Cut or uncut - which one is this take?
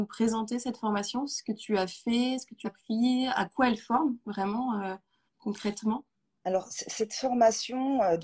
cut